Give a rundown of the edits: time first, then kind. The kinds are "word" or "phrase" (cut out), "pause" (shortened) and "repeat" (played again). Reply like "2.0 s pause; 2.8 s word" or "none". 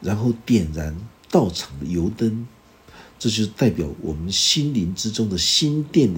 1.2 s pause